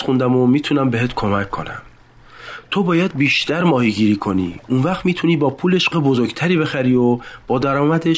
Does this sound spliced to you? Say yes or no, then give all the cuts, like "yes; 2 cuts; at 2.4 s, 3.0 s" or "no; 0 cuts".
yes; 1 cut; at 5.9 s